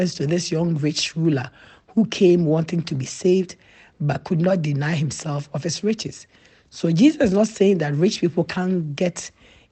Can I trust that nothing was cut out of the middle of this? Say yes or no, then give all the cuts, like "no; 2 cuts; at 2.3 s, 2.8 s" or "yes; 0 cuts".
yes; 0 cuts